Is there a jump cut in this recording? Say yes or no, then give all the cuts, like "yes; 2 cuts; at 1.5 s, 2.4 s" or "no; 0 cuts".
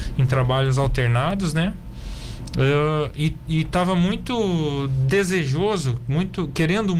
no; 0 cuts